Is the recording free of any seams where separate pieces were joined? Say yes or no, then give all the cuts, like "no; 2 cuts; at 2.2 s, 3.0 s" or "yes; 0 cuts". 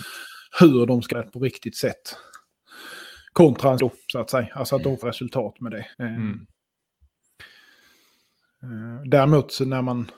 no; 4 cuts; at 1.1 s, 3.8 s, 5.0 s, 5.9 s